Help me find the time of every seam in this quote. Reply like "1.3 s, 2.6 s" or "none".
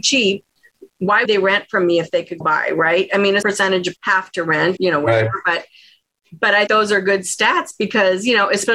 1.3 s, 2.4 s, 3.4 s, 4.0 s, 4.8 s, 6.7 s